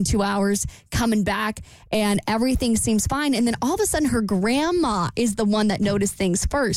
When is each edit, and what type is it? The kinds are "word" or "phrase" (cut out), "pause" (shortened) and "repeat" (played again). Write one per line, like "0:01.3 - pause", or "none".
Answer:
none